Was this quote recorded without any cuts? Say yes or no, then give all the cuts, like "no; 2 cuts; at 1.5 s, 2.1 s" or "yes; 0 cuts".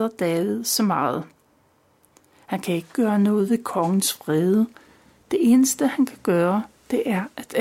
yes; 0 cuts